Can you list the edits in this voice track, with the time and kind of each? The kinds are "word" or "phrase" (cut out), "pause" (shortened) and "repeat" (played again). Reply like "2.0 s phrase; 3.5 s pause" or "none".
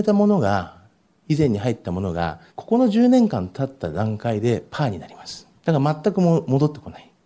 2.5 s pause; 5.6 s pause